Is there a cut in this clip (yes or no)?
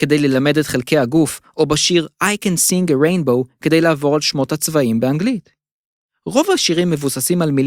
no